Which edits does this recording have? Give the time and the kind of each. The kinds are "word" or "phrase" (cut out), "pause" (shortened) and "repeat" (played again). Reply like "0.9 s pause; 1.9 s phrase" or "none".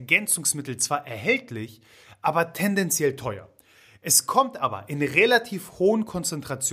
none